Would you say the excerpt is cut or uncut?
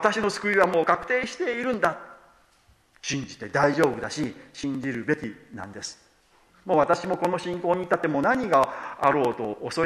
uncut